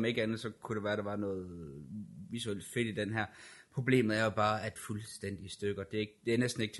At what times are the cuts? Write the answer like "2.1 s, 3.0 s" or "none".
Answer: 4.8 s